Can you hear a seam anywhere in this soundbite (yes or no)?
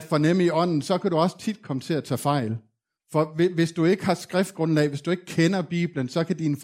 yes